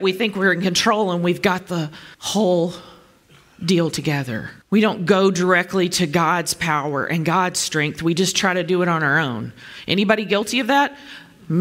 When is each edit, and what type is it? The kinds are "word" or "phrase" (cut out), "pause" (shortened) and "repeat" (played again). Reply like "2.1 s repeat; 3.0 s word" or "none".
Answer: 2.1 s pause; 4.6 s pause